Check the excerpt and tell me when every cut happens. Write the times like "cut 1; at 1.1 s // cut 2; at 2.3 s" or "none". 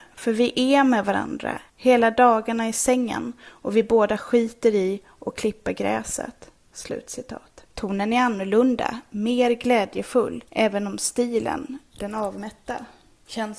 cut 1; at 1.7 s // cut 2; at 7.7 s // cut 3; at 10.5 s